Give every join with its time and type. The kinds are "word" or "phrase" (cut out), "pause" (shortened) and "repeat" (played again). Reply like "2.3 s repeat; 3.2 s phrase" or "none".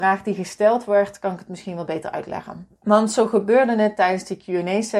2.8 s pause